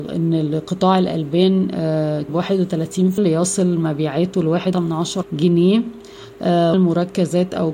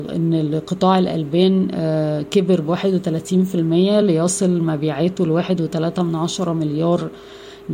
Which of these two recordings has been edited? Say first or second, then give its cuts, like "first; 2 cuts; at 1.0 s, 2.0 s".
first; 5 cuts; at 2.3 s, 3.2 s, 4.7 s, 5.2 s, 6.7 s